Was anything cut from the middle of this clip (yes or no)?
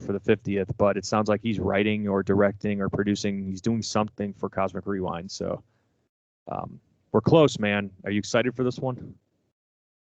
no